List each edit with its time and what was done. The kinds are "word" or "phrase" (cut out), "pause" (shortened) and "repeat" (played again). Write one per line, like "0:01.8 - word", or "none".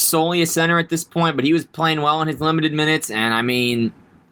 none